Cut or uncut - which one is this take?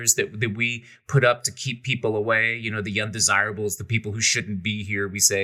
uncut